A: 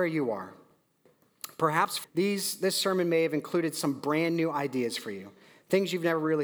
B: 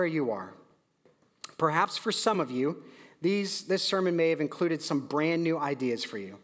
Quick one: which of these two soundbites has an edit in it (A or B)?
A